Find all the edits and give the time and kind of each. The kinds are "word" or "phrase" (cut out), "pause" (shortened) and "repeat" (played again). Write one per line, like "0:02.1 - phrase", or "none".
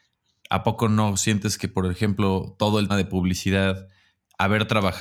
0:02.9 - word